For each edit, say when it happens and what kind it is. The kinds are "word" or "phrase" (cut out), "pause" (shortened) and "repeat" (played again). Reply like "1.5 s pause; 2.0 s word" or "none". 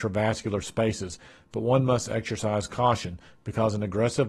none